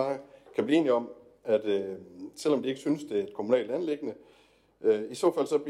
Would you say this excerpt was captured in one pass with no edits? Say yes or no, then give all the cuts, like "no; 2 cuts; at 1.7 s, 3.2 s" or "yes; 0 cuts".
yes; 0 cuts